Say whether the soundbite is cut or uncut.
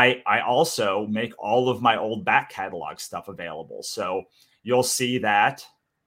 uncut